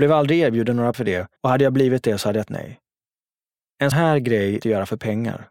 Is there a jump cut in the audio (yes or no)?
yes